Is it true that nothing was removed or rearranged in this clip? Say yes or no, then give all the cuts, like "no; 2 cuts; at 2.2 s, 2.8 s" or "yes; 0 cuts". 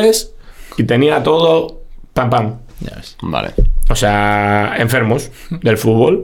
yes; 0 cuts